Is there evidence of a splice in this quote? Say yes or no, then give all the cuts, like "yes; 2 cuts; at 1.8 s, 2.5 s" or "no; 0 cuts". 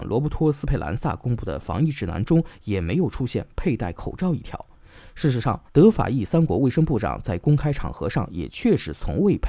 yes; 1 cut; at 5.7 s